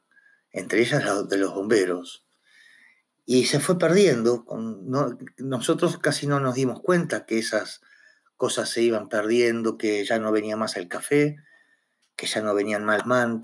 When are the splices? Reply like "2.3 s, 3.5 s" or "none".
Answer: none